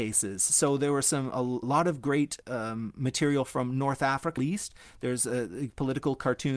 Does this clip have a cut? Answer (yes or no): yes